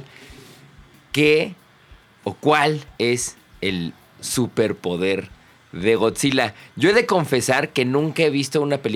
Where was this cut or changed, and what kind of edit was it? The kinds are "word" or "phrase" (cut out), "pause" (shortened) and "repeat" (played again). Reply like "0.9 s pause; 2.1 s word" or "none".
2.9 s pause